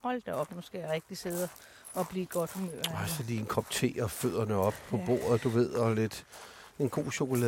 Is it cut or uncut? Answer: uncut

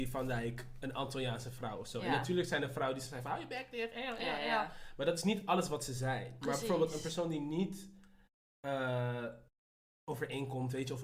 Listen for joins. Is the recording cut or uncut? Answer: uncut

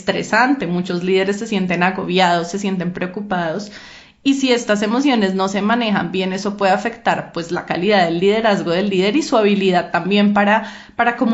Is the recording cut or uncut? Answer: uncut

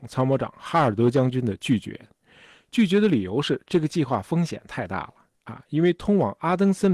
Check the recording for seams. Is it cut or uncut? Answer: uncut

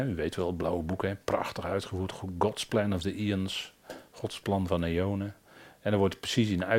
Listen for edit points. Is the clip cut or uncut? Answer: uncut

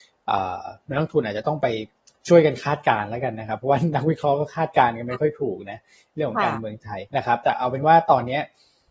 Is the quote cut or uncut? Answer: cut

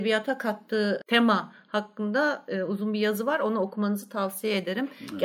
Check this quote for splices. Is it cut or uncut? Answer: uncut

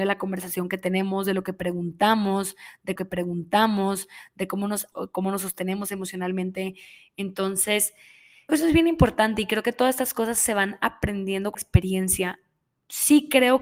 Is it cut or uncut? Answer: cut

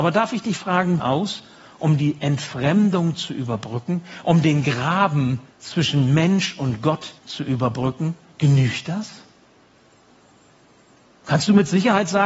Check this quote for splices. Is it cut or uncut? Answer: cut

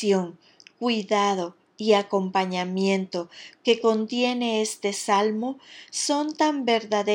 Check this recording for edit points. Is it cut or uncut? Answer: uncut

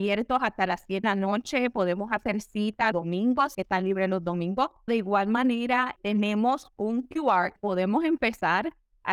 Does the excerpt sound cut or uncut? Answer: cut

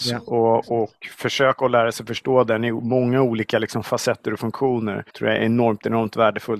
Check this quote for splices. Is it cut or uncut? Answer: cut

